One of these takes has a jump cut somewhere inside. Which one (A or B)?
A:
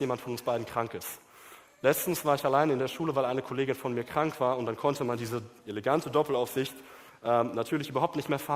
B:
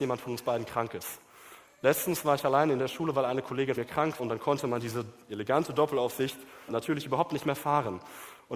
B